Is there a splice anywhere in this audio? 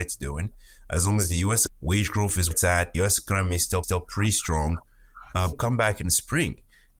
yes; 5 cuts; at 1.7 s, 2.5 s, 2.9 s, 3.8 s, 5.5 s

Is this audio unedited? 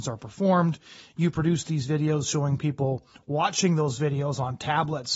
yes; 0 cuts

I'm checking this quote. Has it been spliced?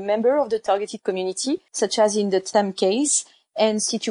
no; 0 cuts

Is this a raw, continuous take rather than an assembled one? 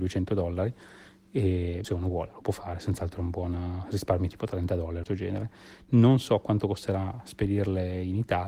no; 2 cuts; at 1.8 s, 5.0 s

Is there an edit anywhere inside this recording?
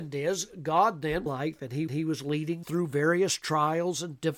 yes; 3 cuts; at 1.3 s, 1.9 s, 2.6 s

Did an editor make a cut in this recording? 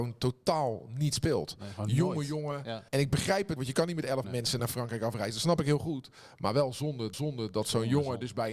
yes; 5 cuts; at 2.9 s, 3.6 s, 4.2 s, 4.6 s, 7.1 s

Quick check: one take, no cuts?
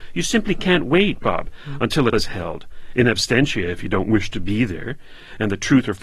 no; 1 cut; at 2.1 s

